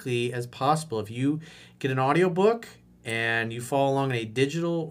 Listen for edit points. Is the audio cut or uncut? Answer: uncut